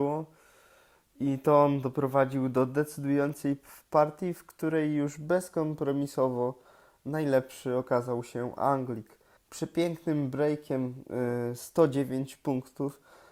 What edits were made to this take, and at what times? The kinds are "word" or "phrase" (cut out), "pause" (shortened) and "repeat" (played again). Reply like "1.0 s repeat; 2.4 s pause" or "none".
9.4 s pause